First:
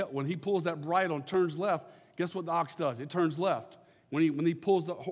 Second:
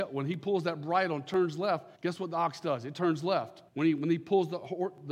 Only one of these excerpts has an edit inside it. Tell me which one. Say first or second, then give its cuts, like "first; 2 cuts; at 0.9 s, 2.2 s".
second; 2 cuts; at 2.0 s, 3.7 s